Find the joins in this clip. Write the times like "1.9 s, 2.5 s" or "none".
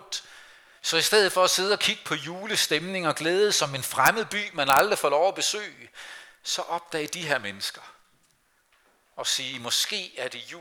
none